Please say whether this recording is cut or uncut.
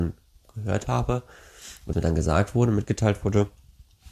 cut